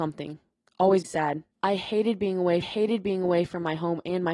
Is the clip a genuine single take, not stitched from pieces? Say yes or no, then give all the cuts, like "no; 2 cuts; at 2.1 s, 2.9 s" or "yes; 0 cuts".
no; 3 cuts; at 1.0 s, 1.5 s, 2.6 s